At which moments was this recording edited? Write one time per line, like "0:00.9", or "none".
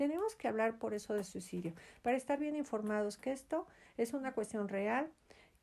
none